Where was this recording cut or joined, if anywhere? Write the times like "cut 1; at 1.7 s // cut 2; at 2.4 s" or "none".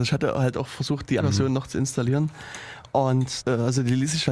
cut 1; at 1.2 s // cut 2; at 3.4 s

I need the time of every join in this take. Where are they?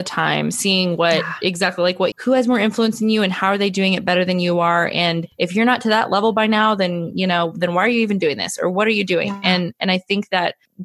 cut 1; at 2.1 s

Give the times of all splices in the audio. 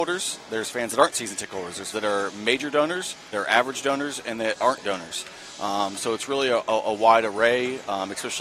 cut 1; at 1.9 s // cut 2; at 3.3 s

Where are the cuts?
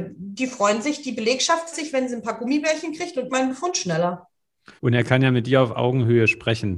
cut 1; at 1.7 s // cut 2; at 3.3 s // cut 3; at 4.8 s

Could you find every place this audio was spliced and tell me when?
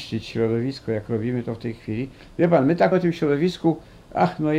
cut 1; at 2.9 s

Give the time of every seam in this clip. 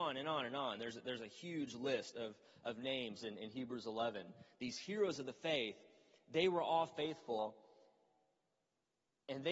none

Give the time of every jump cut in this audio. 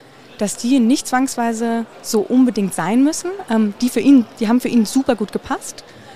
cut 1; at 1.9 s

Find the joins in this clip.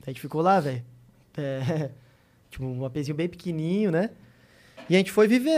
none

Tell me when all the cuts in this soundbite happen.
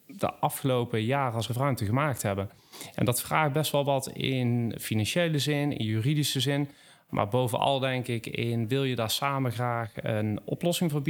cut 1; at 1.5 s

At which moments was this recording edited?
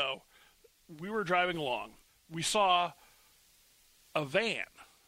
cut 1; at 2.1 s

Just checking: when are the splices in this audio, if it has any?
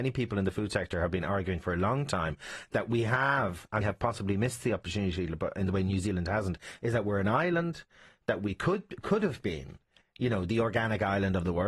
cut 1; at 3.8 s

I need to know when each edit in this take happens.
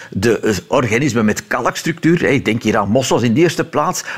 none

